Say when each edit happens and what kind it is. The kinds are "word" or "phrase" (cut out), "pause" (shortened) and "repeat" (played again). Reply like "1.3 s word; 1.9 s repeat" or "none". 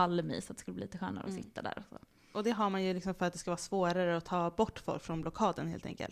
none